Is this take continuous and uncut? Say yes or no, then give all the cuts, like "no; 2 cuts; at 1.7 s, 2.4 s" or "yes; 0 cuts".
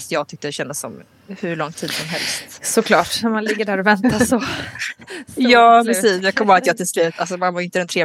no; 1 cut; at 5.8 s